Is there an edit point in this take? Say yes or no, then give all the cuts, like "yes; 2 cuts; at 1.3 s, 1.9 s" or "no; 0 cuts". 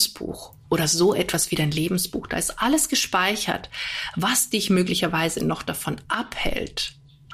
no; 0 cuts